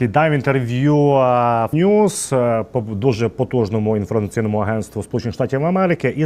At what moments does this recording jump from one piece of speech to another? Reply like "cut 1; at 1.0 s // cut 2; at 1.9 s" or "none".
cut 1; at 1.7 s